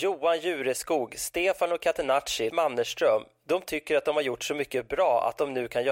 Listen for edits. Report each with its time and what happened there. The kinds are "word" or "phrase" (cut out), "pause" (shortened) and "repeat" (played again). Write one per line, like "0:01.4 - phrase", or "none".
0:02.5 - word